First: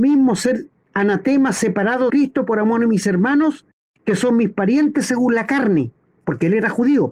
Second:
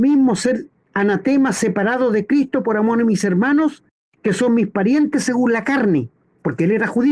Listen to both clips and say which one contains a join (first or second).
first